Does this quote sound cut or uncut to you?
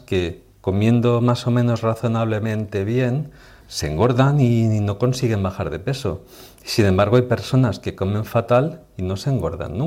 cut